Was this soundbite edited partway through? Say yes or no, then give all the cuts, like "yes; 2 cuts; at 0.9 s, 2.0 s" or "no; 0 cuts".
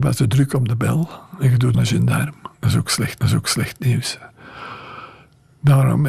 yes; 3 cuts; at 1.7 s, 2.5 s, 3.2 s